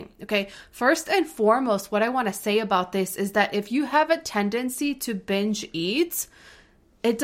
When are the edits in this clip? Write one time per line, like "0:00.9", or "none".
none